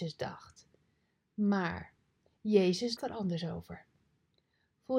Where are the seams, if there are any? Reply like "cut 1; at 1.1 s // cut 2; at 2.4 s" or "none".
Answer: cut 1; at 3.0 s